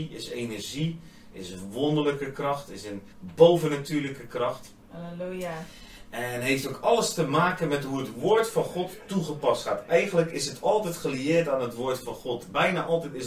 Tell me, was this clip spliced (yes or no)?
yes